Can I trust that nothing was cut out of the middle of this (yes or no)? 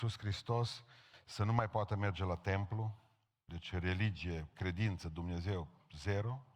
yes